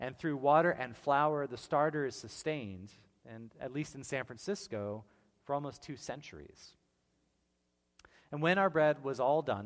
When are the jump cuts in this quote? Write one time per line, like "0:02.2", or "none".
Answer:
none